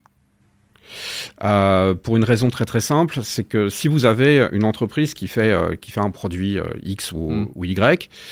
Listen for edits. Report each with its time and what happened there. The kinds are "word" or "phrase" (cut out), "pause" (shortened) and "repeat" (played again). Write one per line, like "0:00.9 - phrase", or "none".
none